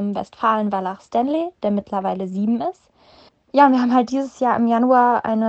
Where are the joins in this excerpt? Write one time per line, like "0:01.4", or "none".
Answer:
0:03.3